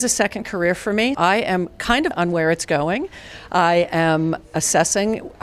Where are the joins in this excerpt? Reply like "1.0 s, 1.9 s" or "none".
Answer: 1.1 s, 2.1 s